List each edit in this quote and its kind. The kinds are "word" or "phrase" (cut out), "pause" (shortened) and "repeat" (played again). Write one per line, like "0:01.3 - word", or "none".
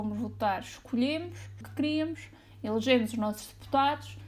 0:01.6 - phrase